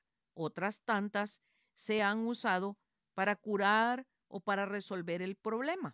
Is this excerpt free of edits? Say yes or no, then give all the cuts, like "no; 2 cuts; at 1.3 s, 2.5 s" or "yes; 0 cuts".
yes; 0 cuts